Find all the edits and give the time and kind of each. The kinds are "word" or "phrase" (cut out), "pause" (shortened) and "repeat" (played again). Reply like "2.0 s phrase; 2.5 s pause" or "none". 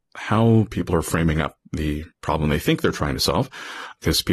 2.1 s pause